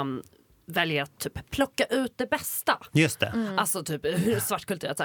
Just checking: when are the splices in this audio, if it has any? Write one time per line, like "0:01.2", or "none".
none